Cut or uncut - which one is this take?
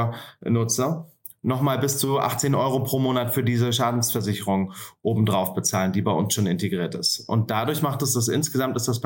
uncut